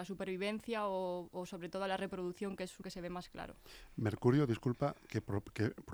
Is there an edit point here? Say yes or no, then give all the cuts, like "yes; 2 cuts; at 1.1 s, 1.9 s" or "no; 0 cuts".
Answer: yes; 1 cut; at 2.8 s